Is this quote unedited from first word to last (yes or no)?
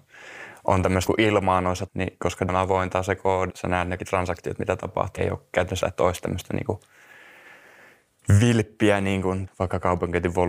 no